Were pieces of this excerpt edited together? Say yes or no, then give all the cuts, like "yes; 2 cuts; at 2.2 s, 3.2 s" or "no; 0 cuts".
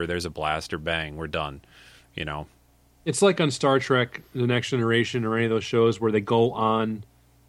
no; 0 cuts